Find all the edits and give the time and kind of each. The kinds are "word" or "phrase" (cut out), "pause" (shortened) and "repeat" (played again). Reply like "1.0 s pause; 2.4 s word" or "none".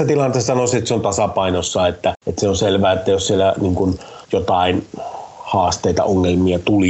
2.2 s pause; 4.2 s pause